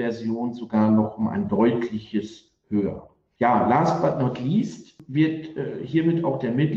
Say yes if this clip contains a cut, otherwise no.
no